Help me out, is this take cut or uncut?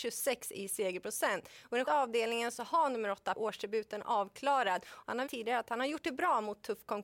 cut